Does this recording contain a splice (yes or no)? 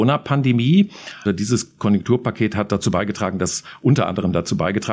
no